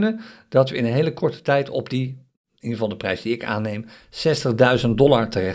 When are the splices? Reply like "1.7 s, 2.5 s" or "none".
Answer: none